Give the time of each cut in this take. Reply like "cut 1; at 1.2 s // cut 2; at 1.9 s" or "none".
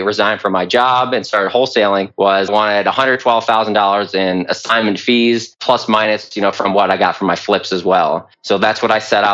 cut 1; at 2.5 s